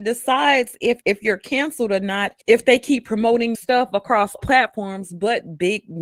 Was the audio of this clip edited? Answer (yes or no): yes